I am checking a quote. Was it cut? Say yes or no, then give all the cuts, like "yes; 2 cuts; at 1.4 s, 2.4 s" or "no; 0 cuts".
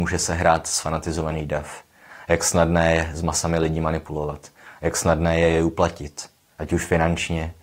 no; 0 cuts